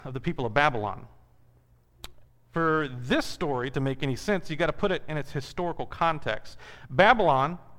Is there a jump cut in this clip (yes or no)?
no